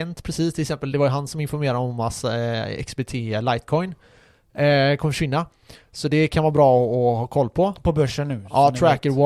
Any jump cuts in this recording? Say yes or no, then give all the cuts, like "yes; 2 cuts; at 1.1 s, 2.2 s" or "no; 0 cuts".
no; 0 cuts